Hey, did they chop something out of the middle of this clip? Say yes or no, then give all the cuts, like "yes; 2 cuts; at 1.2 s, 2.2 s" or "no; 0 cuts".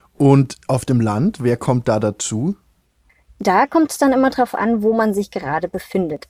no; 0 cuts